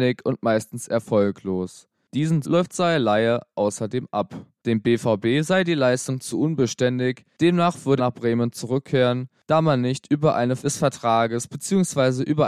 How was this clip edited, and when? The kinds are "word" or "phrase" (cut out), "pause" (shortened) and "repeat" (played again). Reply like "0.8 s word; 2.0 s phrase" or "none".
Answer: 2.4 s word; 8.0 s word; 10.6 s word